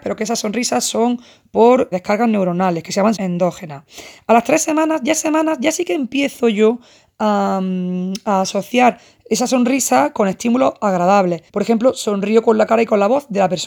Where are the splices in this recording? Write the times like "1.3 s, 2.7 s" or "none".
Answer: 1.9 s, 3.2 s, 5.2 s, 11.5 s